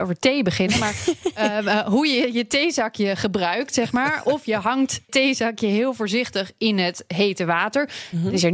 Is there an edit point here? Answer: yes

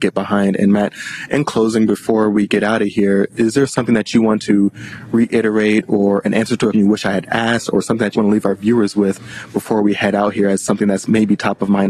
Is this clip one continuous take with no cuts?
no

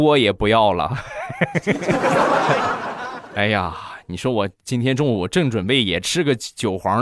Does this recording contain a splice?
no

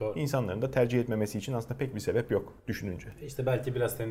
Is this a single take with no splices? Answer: no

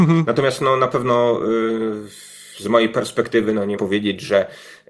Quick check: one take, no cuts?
no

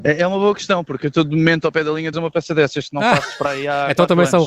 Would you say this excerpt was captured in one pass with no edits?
no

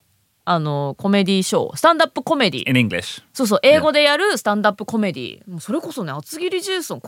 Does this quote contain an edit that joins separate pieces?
yes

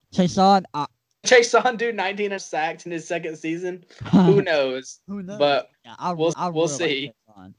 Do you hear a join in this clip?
yes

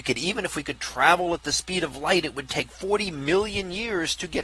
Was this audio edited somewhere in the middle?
no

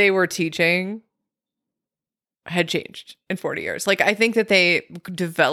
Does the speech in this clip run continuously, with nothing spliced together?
yes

